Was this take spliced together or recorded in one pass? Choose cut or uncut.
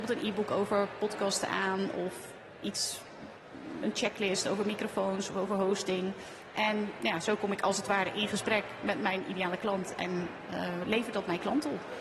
uncut